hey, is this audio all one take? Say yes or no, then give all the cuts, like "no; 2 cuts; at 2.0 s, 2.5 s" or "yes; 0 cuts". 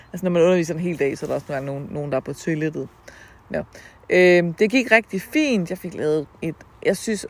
yes; 0 cuts